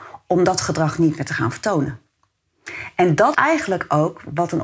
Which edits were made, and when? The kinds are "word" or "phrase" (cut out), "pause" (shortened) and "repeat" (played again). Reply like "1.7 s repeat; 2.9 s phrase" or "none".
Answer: 3.3 s word